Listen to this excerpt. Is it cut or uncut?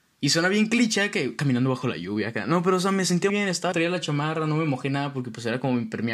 cut